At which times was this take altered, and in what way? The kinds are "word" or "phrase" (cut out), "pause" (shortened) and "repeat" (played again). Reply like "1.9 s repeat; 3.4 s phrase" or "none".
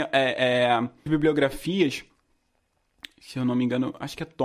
1.1 s word